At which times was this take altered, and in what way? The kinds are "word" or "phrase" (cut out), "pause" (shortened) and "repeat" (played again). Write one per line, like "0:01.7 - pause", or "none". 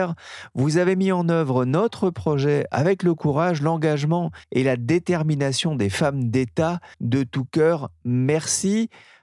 0:04.4 - pause
0:06.9 - pause